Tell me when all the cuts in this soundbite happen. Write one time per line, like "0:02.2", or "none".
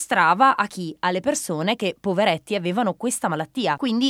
none